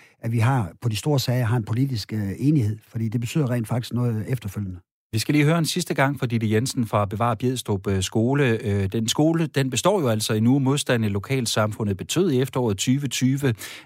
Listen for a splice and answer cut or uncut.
uncut